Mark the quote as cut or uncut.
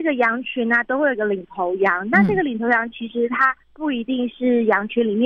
cut